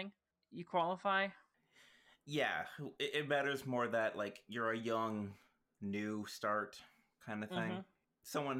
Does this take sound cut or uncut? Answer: uncut